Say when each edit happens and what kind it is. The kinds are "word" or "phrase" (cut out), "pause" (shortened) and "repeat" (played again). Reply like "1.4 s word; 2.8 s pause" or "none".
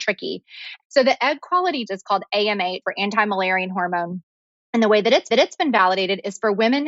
1.9 s word; 2.8 s word; 5.3 s repeat